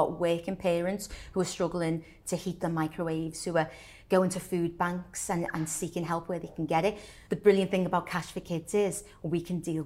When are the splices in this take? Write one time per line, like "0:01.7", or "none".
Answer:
0:02.6
0:07.3

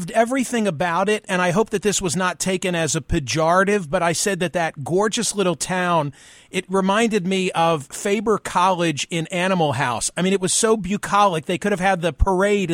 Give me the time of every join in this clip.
none

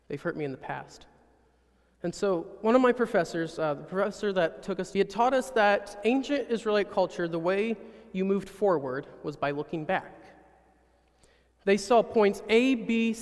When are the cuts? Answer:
0:04.9

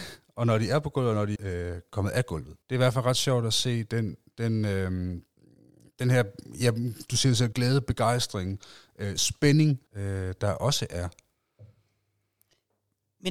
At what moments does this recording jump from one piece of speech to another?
0:01.4
0:02.6
0:05.4
0:07.5
0:09.9

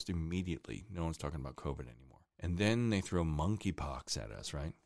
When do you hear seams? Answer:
0:02.3

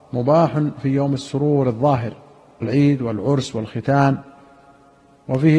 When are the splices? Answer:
0:02.6

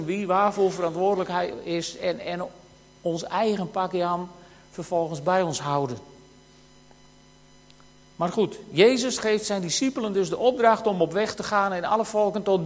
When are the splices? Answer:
none

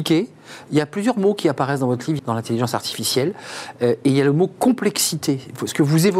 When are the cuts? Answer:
0:02.2

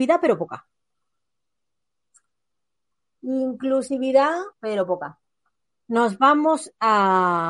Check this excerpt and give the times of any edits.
0:04.5
0:05.6

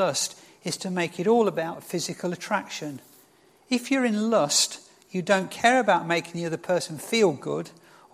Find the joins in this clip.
none

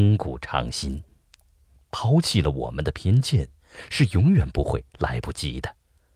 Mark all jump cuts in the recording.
none

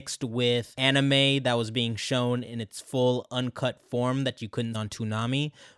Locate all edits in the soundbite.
0:04.7

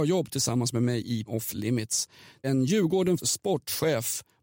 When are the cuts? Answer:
0:01.3
0:02.4
0:03.2

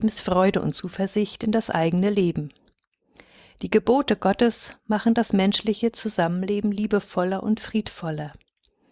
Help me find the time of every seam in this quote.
none

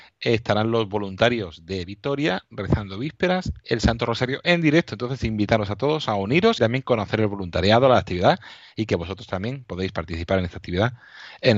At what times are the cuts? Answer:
0:03.6
0:06.6

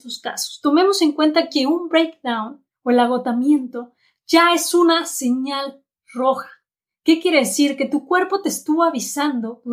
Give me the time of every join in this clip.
none

